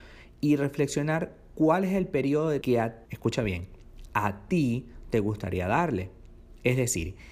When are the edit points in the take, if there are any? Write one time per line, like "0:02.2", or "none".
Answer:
0:02.6
0:03.1